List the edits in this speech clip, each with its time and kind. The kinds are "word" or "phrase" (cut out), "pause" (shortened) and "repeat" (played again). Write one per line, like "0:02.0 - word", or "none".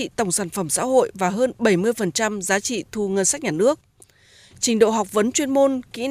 none